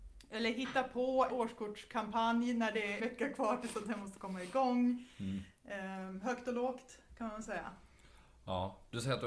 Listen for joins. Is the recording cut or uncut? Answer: cut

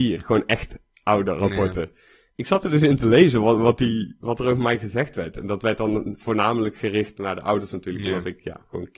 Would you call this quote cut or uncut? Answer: uncut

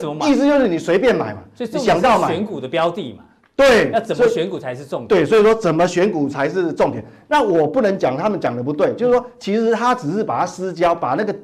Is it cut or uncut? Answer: uncut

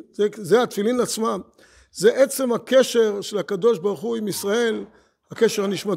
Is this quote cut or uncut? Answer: uncut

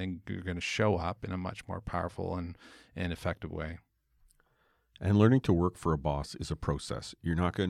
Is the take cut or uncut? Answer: uncut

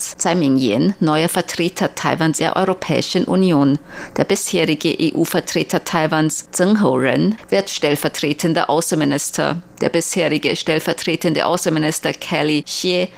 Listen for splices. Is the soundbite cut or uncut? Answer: cut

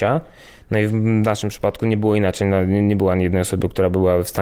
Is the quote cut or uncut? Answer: uncut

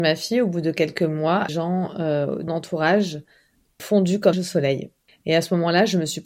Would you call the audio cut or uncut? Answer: cut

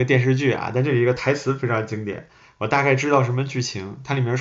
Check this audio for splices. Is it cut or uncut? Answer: uncut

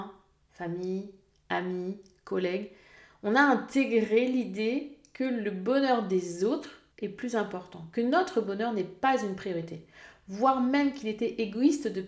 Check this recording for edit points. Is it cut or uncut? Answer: cut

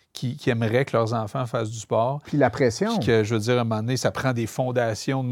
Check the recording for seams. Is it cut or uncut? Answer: uncut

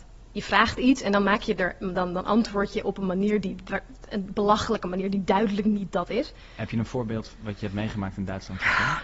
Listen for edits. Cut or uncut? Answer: uncut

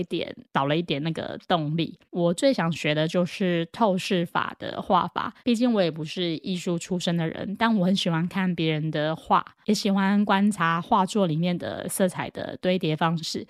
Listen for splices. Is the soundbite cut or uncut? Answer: cut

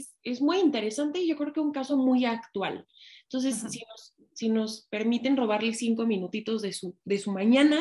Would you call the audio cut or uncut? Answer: uncut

